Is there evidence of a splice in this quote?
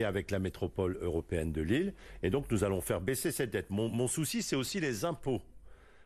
no; 0 cuts

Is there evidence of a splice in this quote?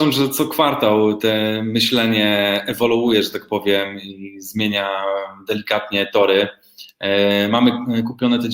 no; 0 cuts

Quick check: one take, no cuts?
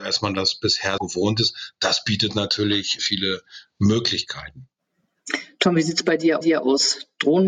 no; 3 cuts; at 1.0 s, 3.0 s, 6.4 s

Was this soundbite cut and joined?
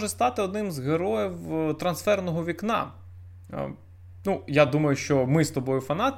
no; 0 cuts

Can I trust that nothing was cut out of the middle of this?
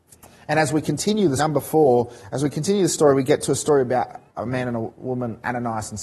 no; 2 cuts; at 1.4 s, 4.3 s

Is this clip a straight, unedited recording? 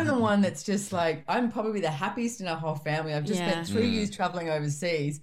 yes; 0 cuts

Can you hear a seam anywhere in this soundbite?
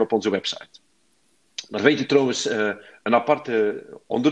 no; 0 cuts

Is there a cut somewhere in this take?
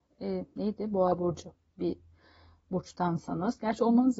no; 0 cuts

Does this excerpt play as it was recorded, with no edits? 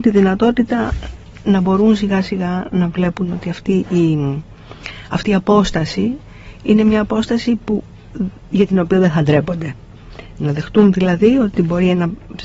yes; 0 cuts

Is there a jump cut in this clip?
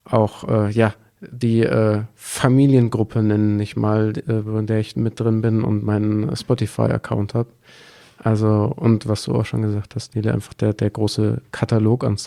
no; 0 cuts

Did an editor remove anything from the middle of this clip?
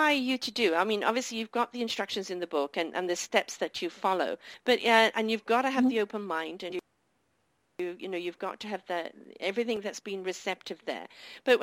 no; 0 cuts

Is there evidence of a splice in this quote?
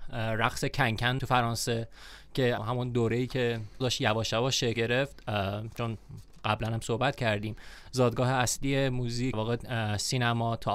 yes; 5 cuts; at 1.2 s, 2.6 s, 3.8 s, 4.8 s, 9.3 s

